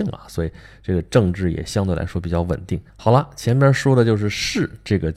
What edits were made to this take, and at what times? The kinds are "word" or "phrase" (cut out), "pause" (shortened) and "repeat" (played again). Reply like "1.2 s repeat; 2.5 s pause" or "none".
2.9 s pause